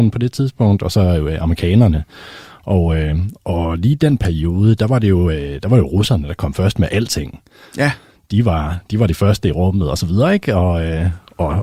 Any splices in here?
no; 0 cuts

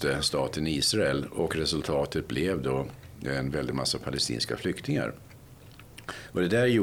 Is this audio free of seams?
yes; 0 cuts

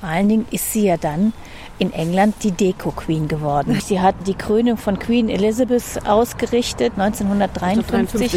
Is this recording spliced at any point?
no; 0 cuts

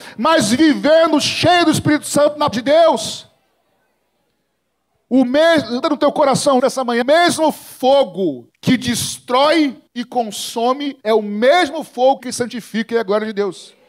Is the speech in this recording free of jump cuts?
no; 8 cuts; at 2.5 s, 5.8 s, 6.6 s, 7.0 s, 8.5 s, 9.9 s, 11.0 s, 12.2 s

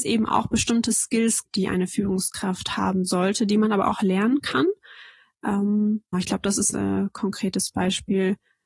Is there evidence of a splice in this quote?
yes; 3 cuts; at 1.5 s, 6.1 s, 6.7 s

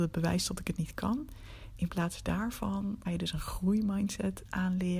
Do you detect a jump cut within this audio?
yes; 1 cut; at 3.0 s

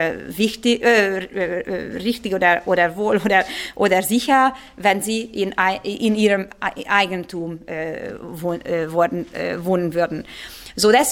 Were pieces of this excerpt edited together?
no; 0 cuts

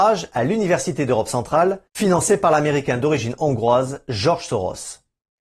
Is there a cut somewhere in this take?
yes; 1 cut; at 1.9 s

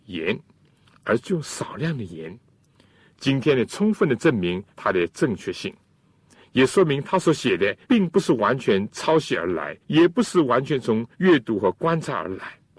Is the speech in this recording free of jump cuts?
no; 4 cuts; at 4.7 s, 7.8 s, 9.8 s, 11.1 s

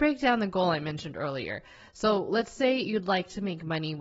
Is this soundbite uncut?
yes; 0 cuts

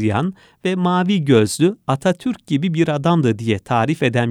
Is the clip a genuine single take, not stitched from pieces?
yes; 0 cuts

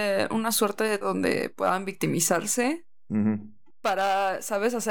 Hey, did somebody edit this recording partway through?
yes; 1 cut; at 1.0 s

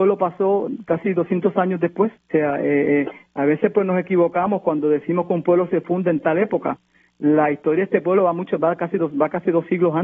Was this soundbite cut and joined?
yes; 1 cut; at 2.2 s

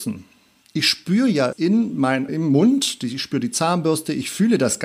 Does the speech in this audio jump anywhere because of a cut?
yes; 2 cuts; at 1.5 s, 2.3 s

